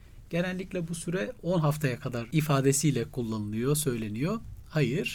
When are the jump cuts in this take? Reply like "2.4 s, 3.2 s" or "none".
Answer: none